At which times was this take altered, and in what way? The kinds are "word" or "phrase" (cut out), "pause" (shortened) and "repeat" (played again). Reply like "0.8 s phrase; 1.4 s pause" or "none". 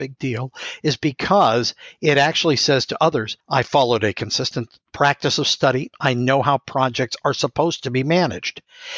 3.4 s pause